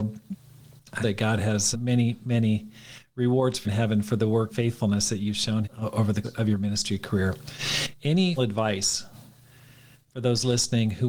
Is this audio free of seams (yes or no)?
no